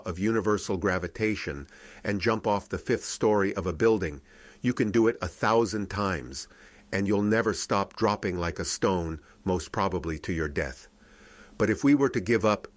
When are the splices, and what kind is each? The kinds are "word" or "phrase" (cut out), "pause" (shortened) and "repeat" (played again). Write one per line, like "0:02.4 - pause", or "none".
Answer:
none